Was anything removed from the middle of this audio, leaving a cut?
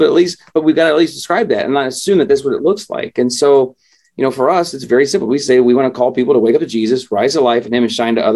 no; 0 cuts

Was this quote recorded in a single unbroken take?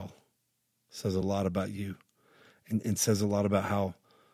yes; 0 cuts

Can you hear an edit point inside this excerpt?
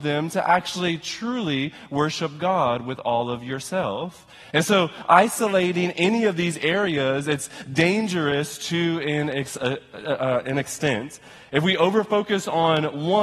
no; 0 cuts

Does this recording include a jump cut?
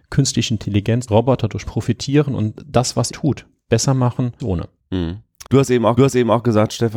yes; 6 cuts; at 1.1 s, 1.7 s, 3.1 s, 4.4 s, 5.5 s, 6.0 s

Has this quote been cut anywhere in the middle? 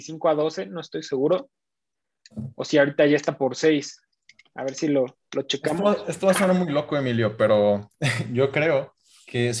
no; 0 cuts

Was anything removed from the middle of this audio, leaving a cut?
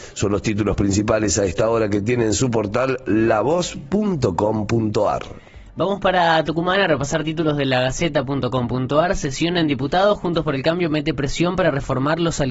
no; 0 cuts

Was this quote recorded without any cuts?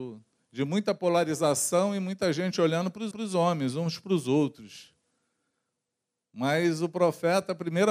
no; 1 cut; at 3.1 s

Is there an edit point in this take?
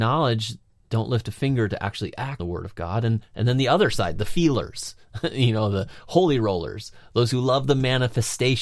yes; 1 cut; at 2.4 s

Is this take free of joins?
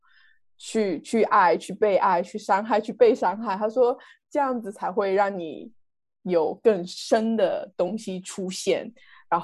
yes; 0 cuts

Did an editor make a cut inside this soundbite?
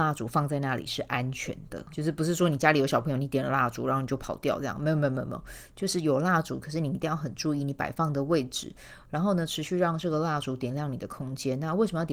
yes; 1 cut; at 1.9 s

